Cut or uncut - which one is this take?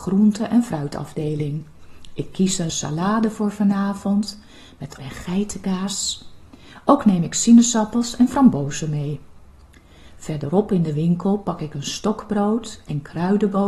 cut